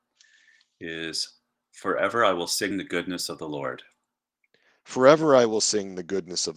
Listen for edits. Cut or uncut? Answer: uncut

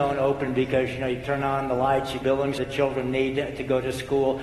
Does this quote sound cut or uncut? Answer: cut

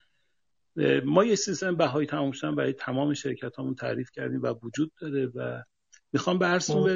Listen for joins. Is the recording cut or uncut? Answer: uncut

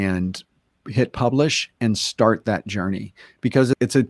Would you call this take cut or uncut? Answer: uncut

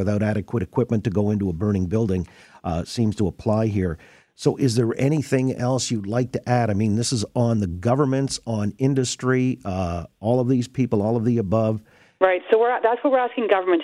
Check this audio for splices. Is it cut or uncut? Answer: uncut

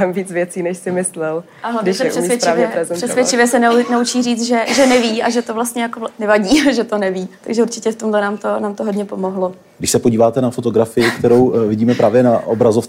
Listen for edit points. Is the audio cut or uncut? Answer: cut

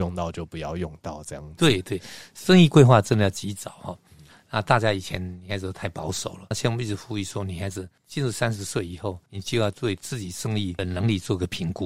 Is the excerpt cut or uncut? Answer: cut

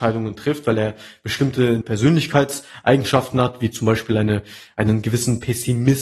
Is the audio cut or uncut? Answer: cut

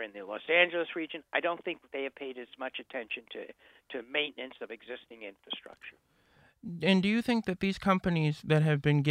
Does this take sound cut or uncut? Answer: uncut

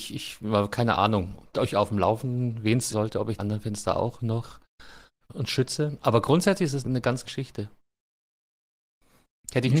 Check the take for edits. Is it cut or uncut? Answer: cut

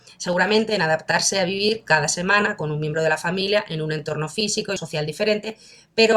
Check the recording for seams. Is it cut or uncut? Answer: cut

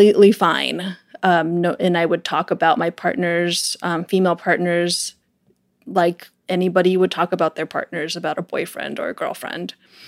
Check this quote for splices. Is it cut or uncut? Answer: uncut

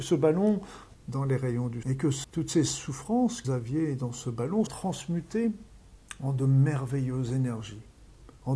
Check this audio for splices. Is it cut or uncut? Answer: cut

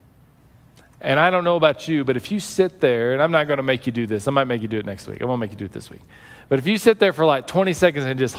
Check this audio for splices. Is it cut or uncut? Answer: uncut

